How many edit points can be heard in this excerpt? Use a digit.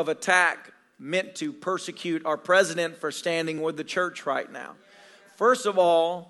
0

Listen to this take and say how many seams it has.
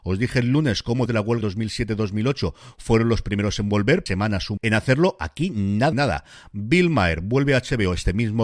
5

